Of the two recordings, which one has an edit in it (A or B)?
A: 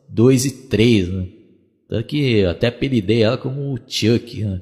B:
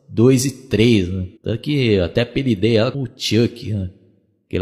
B